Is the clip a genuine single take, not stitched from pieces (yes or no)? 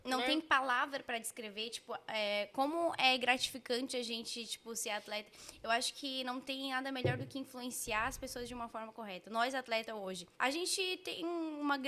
no